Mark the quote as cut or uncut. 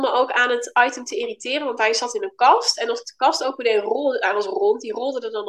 uncut